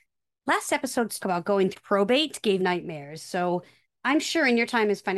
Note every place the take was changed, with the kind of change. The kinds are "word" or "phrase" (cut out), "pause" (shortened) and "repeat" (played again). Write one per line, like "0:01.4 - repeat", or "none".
0:01.2 - word
0:01.7 - word
0:02.6 - word